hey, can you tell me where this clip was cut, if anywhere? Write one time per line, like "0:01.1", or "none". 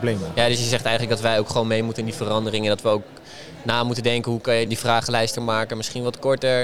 0:04.7
0:05.3